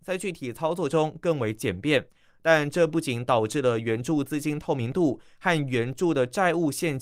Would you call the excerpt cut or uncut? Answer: uncut